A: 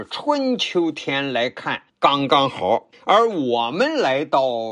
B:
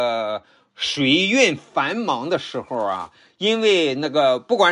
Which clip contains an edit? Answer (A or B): A